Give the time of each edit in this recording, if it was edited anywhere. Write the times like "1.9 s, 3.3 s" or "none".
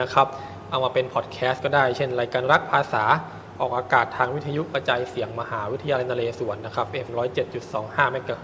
7.1 s